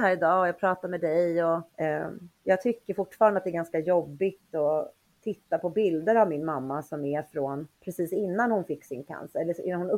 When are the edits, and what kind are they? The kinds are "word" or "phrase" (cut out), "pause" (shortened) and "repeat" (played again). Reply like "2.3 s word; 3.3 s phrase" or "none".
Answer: 1.7 s pause; 7.7 s pause